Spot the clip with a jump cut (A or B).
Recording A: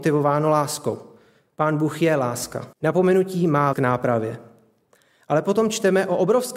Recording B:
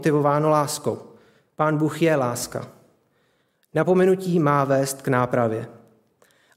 A